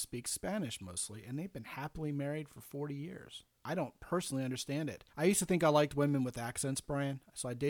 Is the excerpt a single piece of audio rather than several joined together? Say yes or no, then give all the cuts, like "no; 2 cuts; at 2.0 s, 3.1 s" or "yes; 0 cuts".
no; 2 cuts; at 3.5 s, 5.1 s